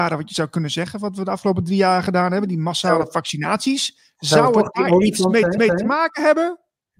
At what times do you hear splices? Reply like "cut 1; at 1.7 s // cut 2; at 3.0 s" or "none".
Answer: cut 1; at 5.6 s